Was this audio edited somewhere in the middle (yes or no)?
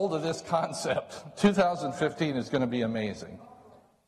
no